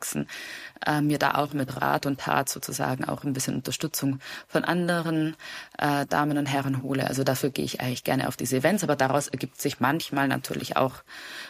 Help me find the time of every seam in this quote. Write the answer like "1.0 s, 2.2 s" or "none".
none